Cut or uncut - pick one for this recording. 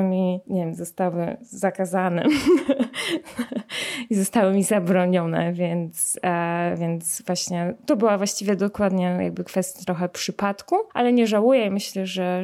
cut